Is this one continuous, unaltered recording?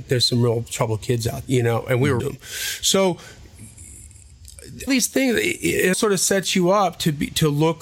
no; 4 cuts; at 1.4 s, 2.2 s, 4.9 s, 5.9 s

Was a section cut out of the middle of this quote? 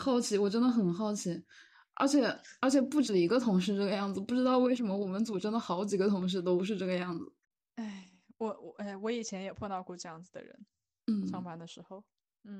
no; 0 cuts

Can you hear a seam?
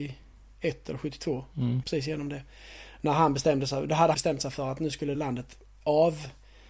yes; 3 cuts; at 1.8 s, 4.1 s, 5.1 s

